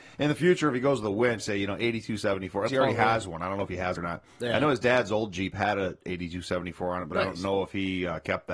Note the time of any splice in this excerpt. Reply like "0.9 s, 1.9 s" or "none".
1.4 s, 2.7 s, 3.9 s